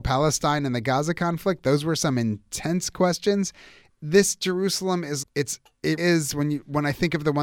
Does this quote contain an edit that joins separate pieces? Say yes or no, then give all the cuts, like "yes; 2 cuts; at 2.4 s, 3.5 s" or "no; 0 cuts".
yes; 2 cuts; at 5.2 s, 6.0 s